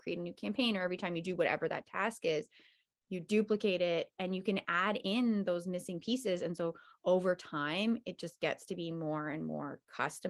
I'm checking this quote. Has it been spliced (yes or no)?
no